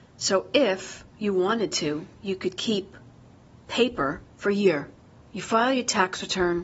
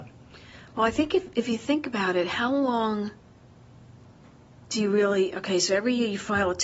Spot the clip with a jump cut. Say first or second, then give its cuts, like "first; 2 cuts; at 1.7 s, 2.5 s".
first; 2 cuts; at 1.1 s, 4.3 s